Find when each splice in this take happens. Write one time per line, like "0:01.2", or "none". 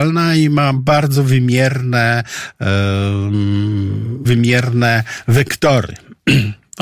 0:04.2